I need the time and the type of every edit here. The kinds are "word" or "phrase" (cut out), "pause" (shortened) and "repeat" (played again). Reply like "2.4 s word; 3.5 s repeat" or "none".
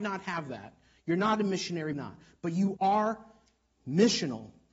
1.9 s word